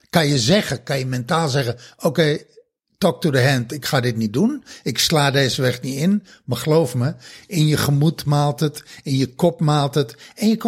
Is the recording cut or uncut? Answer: uncut